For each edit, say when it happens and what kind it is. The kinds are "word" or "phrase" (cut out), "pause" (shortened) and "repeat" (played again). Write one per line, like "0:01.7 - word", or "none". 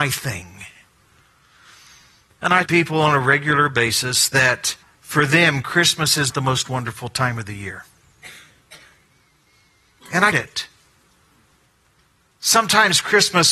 0:02.7 - phrase
0:04.8 - pause
0:06.3 - word
0:10.3 - word